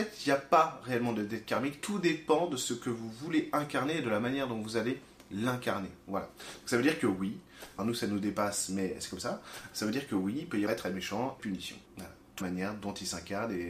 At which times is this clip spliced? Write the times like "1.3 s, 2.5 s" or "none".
7.8 s, 10.7 s, 11.4 s, 11.9 s, 12.4 s